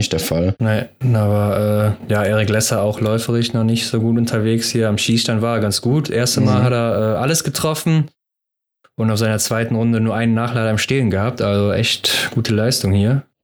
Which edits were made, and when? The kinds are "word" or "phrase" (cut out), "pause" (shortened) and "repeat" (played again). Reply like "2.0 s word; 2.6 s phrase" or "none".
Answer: none